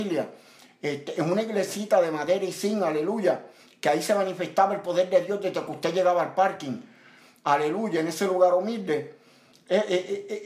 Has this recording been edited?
no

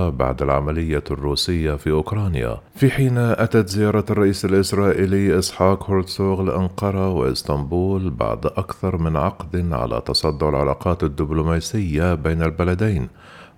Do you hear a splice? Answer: yes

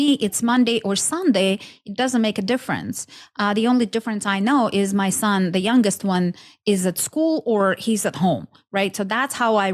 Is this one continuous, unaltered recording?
yes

